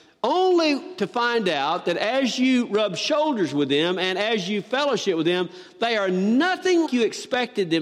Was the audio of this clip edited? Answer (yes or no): yes